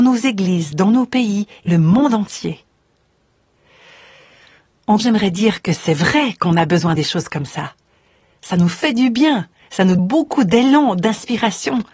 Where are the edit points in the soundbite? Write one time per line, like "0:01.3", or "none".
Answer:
0:01.7
0:05.0
0:07.0
0:10.0

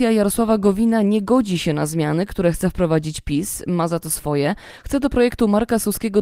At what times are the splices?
none

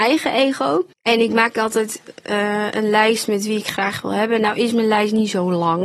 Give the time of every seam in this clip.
0:00.9

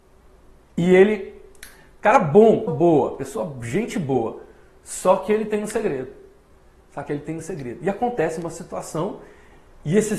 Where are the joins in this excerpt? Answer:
0:02.7

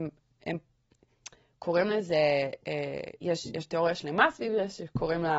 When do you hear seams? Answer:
none

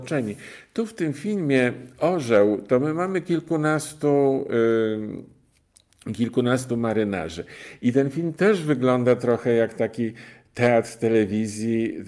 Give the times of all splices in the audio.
none

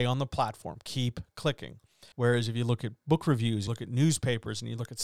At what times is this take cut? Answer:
0:02.1
0:03.7

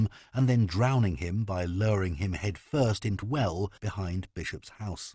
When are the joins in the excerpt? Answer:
0:03.2
0:03.8

